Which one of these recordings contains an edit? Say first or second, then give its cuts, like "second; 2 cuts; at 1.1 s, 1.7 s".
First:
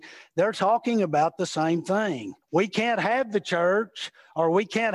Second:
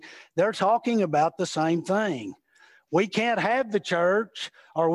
first; 1 cut; at 2.4 s